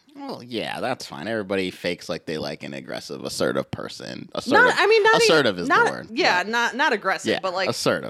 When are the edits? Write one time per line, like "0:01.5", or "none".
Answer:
none